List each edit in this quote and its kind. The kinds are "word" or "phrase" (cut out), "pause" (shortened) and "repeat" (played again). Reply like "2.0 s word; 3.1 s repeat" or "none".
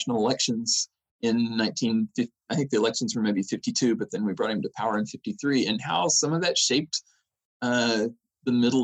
none